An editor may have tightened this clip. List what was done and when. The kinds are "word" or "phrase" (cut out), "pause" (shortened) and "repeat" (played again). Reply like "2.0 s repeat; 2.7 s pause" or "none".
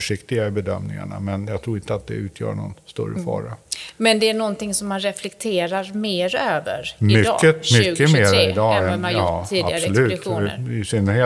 none